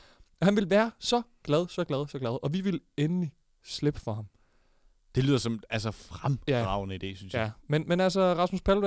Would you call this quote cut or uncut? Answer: uncut